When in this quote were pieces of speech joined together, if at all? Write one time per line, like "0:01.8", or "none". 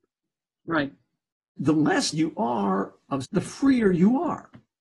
0:01.6
0:02.1
0:03.2